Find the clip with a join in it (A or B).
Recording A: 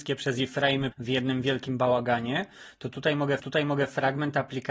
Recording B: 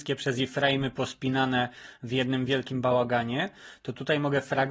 A